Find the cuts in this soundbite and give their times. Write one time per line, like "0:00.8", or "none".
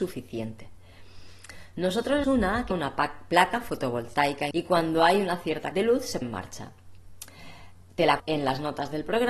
0:02.2
0:02.7
0:04.5
0:05.7
0:06.2
0:08.2